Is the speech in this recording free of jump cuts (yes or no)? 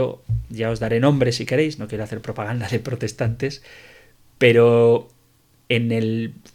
yes